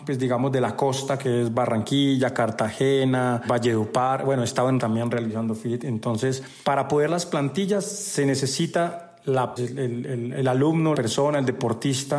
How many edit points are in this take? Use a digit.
4